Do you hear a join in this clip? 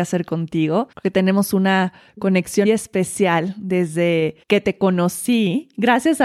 yes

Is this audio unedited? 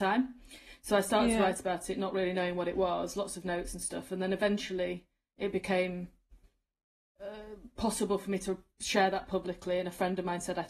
yes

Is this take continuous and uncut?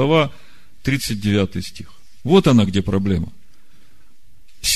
yes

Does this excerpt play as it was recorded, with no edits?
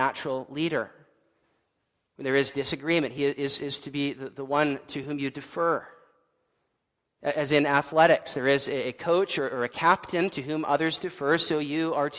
yes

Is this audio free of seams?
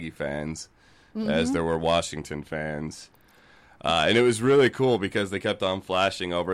yes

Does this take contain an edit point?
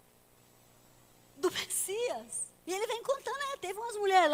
yes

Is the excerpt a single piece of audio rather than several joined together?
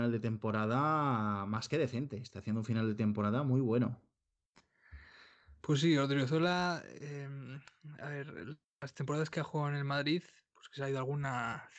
yes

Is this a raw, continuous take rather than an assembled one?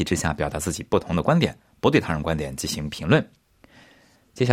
yes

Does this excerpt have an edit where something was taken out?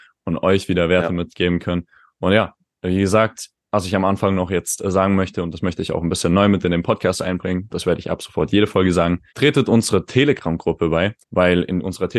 yes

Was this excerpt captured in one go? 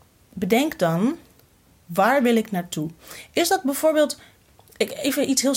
yes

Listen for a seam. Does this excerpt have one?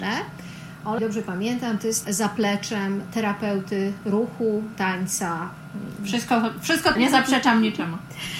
yes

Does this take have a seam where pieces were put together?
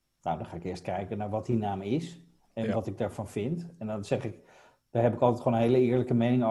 no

